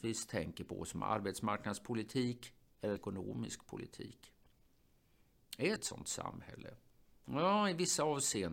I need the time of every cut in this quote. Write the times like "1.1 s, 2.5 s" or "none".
3.0 s, 5.8 s

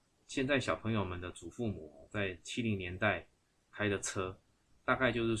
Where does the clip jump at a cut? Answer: none

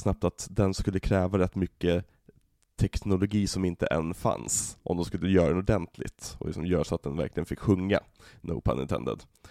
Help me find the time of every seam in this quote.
none

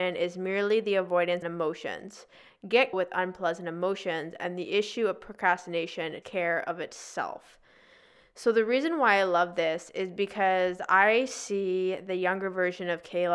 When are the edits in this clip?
1.4 s, 2.9 s, 6.2 s

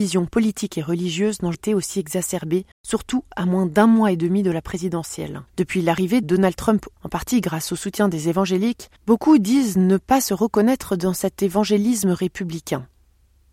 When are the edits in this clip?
1.5 s, 2.7 s, 5.5 s, 6.2 s, 7.0 s, 9.0 s

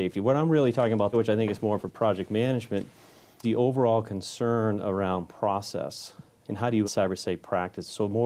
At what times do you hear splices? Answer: 1.1 s, 1.8 s, 3.4 s, 6.4 s, 6.8 s

